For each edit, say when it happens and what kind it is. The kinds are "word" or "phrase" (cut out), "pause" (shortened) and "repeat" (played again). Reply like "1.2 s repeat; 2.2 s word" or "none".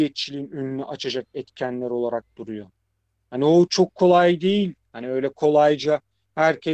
none